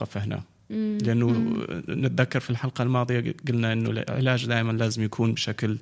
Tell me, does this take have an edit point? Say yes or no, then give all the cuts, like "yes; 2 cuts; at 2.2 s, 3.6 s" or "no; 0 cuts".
no; 0 cuts